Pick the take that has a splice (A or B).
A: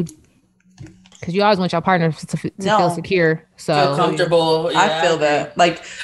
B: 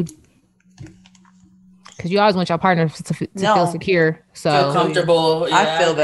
A